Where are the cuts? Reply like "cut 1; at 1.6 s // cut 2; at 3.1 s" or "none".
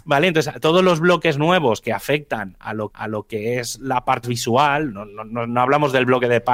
cut 1; at 2.9 s // cut 2; at 4.2 s